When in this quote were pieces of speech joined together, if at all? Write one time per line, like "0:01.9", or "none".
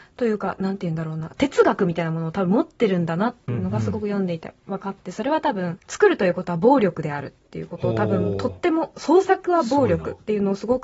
0:05.8